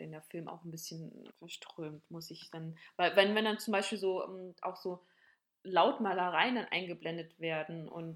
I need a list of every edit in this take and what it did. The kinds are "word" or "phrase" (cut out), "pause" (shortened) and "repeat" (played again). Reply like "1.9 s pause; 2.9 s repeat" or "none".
1.3 s pause